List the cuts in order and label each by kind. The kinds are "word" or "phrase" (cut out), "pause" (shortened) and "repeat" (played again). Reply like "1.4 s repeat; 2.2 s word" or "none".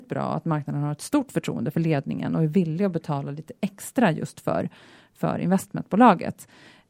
none